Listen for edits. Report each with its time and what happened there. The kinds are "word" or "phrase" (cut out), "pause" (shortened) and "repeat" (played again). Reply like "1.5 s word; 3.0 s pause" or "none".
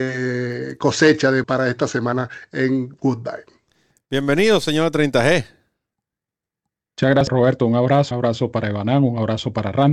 1.4 s word; 8.1 s word